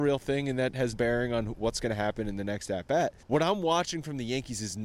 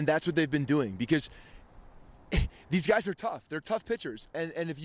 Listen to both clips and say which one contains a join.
first; 2 cuts; at 0.9 s, 3.2 s

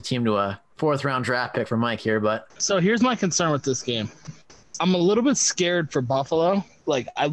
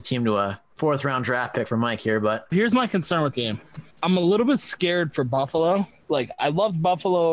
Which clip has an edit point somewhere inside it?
second; 3 cuts; at 2.5 s, 3.3 s, 3.9 s

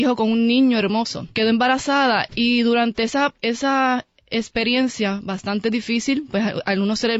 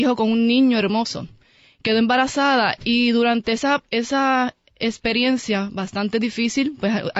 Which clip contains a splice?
first; 1 cut; at 1.3 s

